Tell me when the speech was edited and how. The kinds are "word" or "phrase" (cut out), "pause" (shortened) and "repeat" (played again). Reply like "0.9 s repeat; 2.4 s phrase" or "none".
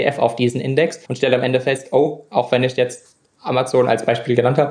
1.0 s pause